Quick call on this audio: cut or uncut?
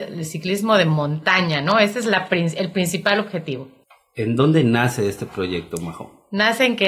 cut